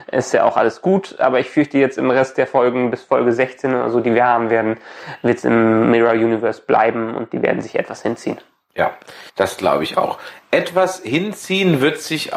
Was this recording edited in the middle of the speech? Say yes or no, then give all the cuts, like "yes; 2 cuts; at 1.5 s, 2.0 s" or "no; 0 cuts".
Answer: yes; 1 cut; at 9.3 s